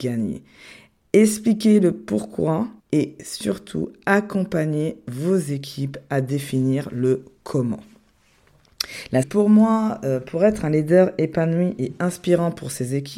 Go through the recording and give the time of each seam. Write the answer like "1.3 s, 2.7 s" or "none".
2.8 s, 9.2 s